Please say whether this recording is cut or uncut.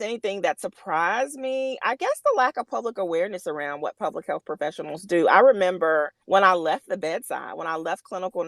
cut